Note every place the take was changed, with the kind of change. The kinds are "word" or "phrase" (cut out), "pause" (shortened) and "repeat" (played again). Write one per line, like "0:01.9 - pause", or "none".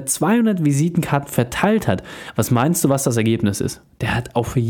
none